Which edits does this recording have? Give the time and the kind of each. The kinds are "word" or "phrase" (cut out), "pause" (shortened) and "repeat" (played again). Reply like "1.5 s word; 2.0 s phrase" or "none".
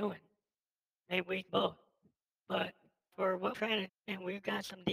1.5 s word; 3.1 s word; 3.5 s word; 3.9 s word